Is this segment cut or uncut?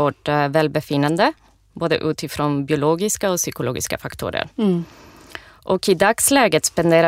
uncut